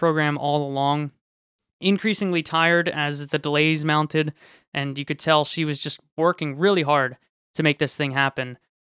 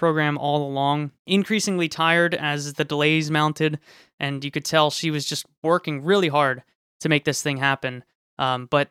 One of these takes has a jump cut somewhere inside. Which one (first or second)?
second